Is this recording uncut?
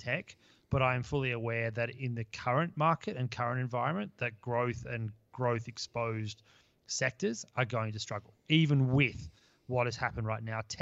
yes; 0 cuts

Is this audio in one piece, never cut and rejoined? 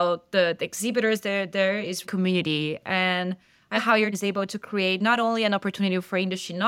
no; 3 cuts; at 2.0 s, 3.8 s, 4.1 s

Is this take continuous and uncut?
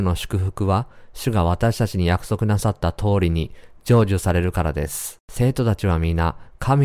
no; 1 cut; at 5.2 s

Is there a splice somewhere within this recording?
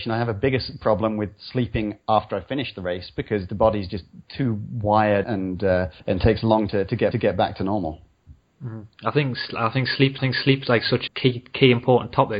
yes; 6 cuts; at 5.2 s, 6.0 s, 6.7 s, 7.1 s, 10.2 s, 11.1 s

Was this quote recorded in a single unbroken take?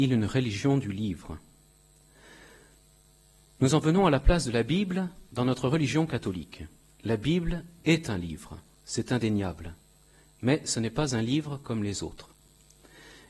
yes; 0 cuts

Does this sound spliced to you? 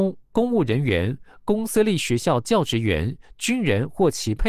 no; 0 cuts

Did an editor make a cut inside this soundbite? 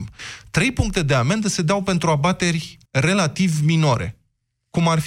yes; 1 cut; at 2.9 s

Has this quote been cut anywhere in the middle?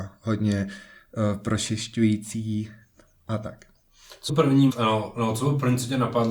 yes; 2 cuts; at 4.3 s, 4.7 s

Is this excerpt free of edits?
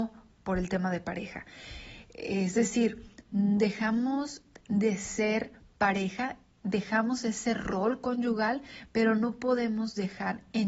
yes; 0 cuts

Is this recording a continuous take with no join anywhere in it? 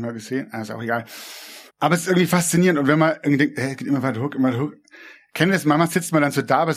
no; 1 cut; at 1.7 s

